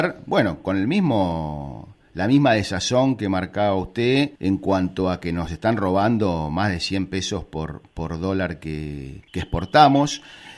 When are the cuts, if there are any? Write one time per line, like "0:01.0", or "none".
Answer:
0:04.3
0:09.3